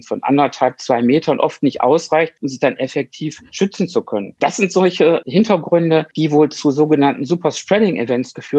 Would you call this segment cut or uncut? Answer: uncut